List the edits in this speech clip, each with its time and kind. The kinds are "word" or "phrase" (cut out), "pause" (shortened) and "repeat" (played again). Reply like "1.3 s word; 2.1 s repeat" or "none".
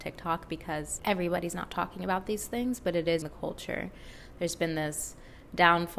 1.0 s word; 3.2 s word